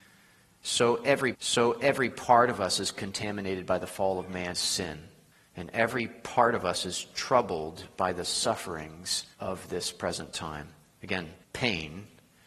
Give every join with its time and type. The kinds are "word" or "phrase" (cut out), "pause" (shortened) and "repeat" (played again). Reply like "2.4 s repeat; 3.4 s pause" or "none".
1.3 s repeat; 4.5 s word; 5.3 s pause; 9.3 s pause; 11.4 s pause